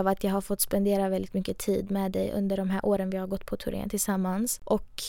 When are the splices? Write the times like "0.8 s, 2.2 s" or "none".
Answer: none